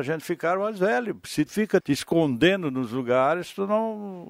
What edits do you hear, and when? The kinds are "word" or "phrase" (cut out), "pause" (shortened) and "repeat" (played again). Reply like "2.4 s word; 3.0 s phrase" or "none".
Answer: 1.5 s word; 1.8 s word